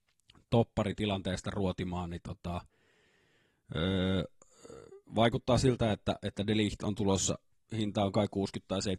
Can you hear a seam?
no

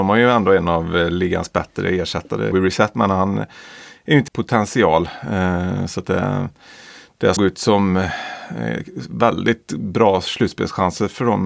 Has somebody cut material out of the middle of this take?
yes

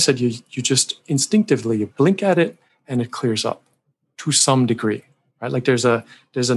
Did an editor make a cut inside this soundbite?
no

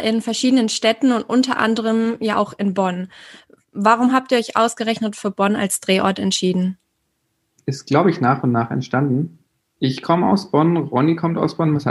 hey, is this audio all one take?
yes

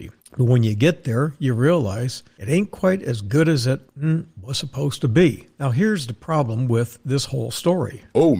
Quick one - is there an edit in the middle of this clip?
no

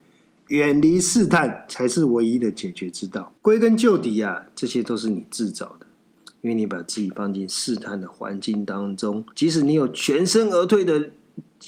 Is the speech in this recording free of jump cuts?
no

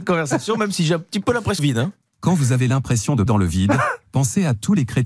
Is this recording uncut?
no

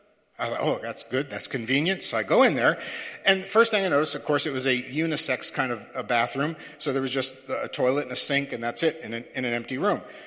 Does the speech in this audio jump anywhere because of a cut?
no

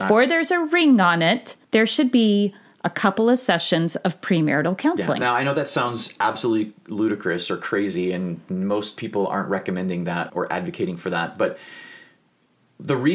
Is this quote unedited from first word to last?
no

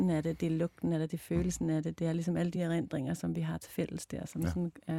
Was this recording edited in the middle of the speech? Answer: no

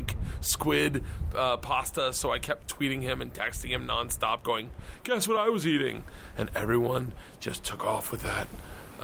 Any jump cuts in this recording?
no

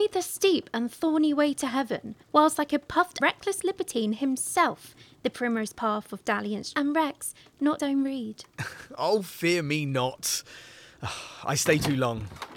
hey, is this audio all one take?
no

